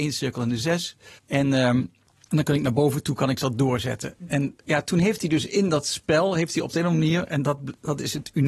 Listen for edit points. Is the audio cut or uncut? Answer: uncut